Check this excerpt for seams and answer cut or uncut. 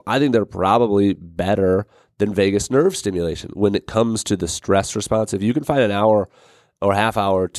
uncut